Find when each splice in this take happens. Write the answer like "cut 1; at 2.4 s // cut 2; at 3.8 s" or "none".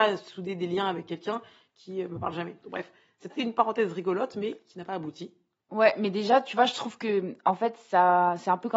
cut 1; at 3.3 s